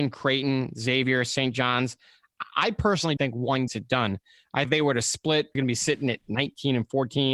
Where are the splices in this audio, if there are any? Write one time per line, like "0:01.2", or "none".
0:03.2
0:03.7
0:04.6
0:05.5